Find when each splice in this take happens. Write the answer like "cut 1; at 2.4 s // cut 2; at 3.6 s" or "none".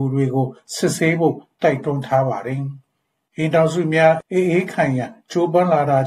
none